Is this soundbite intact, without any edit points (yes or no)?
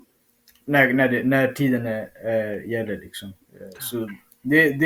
no